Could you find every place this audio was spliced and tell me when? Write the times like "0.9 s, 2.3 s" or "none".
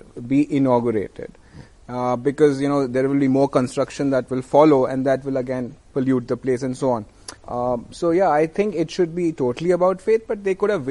7.4 s